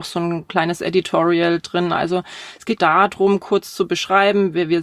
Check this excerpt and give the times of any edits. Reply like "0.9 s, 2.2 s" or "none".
2.8 s

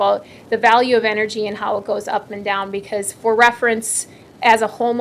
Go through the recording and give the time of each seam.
none

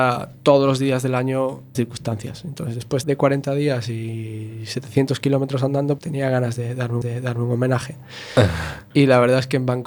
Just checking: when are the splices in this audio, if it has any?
1.7 s, 3.0 s, 6.0 s, 7.0 s, 8.9 s

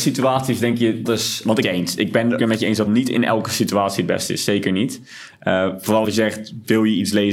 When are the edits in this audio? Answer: 1.0 s, 1.6 s, 2.4 s, 2.9 s, 6.0 s

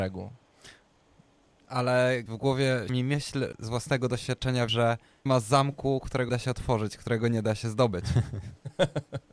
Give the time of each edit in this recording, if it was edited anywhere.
2.3 s, 2.9 s, 3.5 s, 4.7 s, 5.3 s, 6.3 s

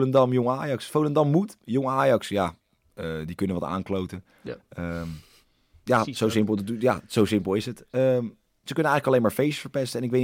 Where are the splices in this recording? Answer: none

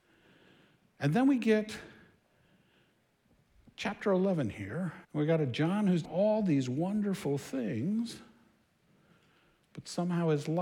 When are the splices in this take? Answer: 3.7 s, 5.0 s, 6.0 s

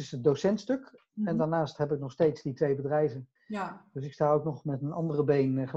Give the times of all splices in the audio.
3.4 s

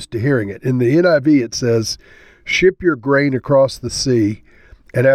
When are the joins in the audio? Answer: none

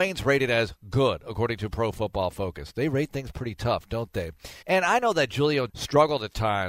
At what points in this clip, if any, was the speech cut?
4.6 s, 5.7 s

